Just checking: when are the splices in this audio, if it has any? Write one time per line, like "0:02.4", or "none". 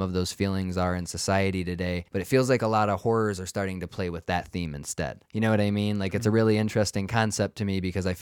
0:02.1
0:05.3